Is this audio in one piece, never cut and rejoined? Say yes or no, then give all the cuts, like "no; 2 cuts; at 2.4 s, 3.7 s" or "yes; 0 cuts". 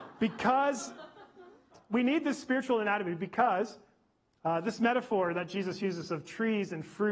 yes; 0 cuts